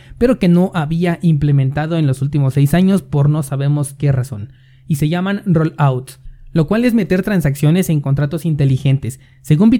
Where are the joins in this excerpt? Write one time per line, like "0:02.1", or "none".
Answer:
none

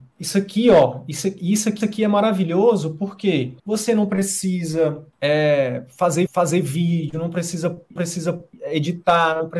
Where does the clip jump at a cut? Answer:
0:01.8
0:03.6
0:06.3
0:08.0

